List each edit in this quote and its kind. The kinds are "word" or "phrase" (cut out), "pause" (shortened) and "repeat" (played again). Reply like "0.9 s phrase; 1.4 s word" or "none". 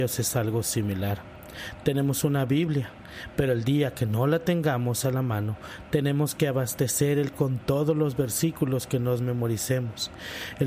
7.3 s word